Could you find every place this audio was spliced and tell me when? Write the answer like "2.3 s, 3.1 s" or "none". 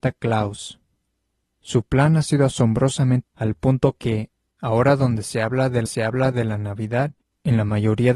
3.2 s, 5.9 s